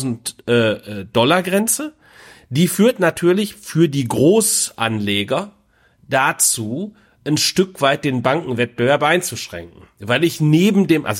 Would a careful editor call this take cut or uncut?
uncut